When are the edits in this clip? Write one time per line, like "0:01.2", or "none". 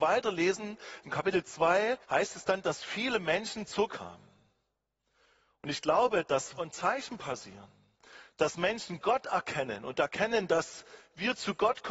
0:02.0
0:03.9
0:06.6

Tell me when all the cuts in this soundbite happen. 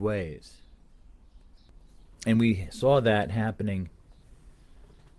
none

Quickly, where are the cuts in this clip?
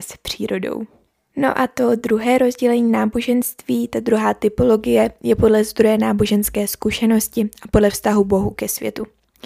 none

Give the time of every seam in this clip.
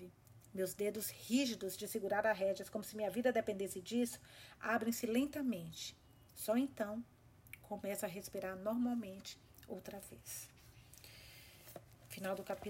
none

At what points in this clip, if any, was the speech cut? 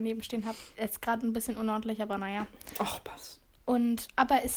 none

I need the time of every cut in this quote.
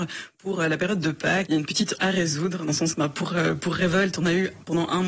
0:01.5
0:02.0
0:02.9

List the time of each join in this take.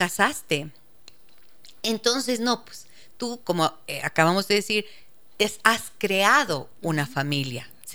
none

